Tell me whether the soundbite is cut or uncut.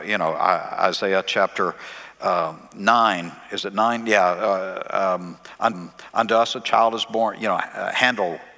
cut